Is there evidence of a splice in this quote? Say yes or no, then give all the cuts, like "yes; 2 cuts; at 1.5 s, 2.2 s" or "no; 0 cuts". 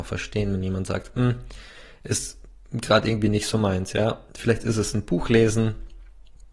yes; 1 cut; at 4.3 s